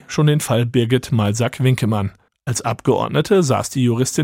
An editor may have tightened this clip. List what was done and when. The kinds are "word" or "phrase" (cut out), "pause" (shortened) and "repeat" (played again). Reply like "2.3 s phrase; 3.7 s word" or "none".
2.3 s pause